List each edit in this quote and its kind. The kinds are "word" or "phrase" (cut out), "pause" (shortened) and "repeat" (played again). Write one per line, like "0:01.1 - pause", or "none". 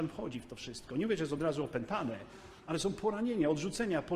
none